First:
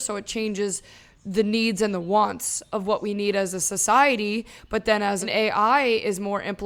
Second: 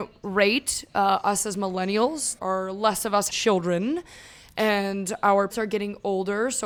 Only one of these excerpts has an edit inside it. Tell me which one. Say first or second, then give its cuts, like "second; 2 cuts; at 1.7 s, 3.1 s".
second; 3 cuts; at 2.4 s, 3.3 s, 5.5 s